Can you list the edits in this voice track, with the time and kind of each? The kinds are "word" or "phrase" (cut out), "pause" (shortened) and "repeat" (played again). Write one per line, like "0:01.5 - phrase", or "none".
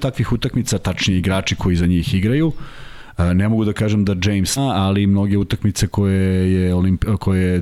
0:04.6 - word